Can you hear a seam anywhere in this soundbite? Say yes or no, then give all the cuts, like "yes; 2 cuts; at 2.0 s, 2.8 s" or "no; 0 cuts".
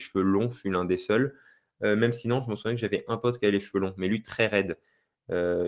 no; 0 cuts